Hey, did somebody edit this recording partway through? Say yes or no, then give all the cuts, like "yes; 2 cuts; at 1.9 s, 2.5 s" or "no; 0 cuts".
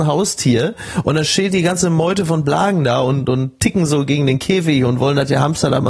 no; 0 cuts